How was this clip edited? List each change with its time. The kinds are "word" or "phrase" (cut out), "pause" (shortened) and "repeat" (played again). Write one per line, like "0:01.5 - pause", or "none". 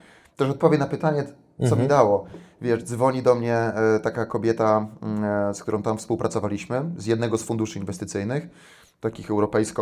none